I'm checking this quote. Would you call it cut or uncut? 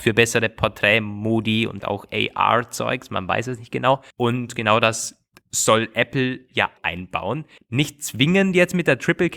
cut